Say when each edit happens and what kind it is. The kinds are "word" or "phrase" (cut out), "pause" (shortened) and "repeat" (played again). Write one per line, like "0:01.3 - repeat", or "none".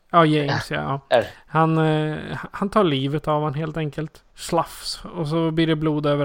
0:04.3 - pause